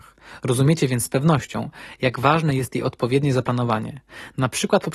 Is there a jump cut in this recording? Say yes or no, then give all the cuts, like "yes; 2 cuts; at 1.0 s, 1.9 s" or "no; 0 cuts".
no; 0 cuts